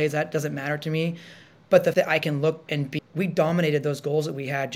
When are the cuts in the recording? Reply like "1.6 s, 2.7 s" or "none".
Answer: 1.9 s, 2.7 s, 3.0 s